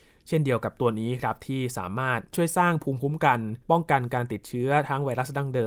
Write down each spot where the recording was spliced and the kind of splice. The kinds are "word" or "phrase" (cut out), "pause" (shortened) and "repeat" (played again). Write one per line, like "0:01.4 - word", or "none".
0:03.6 - pause

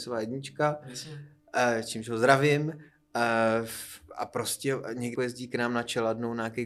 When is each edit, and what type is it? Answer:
0:05.2 - word

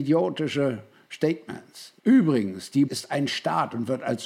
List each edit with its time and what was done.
0:02.0 - pause
0:02.9 - word

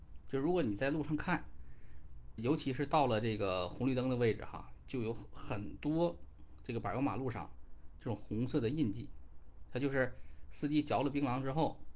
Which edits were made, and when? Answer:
0:02.4 - word

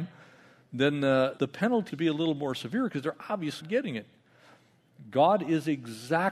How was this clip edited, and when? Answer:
0:01.4 - word
0:01.9 - word
0:03.6 - word

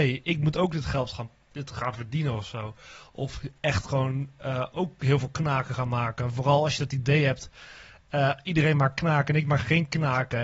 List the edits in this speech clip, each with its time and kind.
none

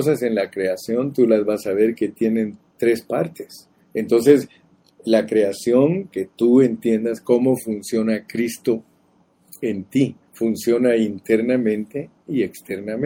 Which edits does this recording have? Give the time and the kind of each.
0:02.6 - word
0:03.8 - pause
0:06.1 - phrase
0:10.2 - pause

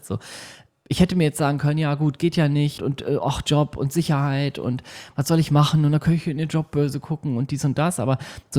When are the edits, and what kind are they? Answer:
0:02.8 - word

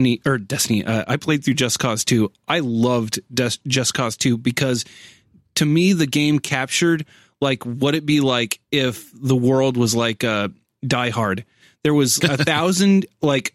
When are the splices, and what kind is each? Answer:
0:12.2 - word

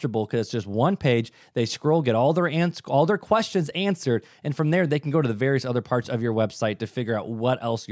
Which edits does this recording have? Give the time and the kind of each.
none

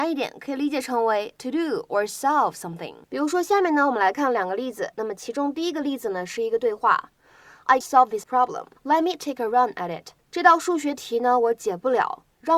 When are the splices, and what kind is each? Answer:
0:01.4 - word
0:03.0 - pause
0:07.8 - word
0:08.2 - word
0:08.8 - pause
0:10.2 - pause

